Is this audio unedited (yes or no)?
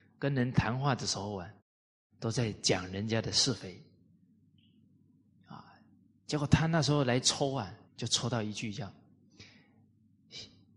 no